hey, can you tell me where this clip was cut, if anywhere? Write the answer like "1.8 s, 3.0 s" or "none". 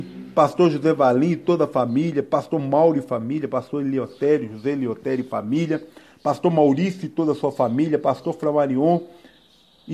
none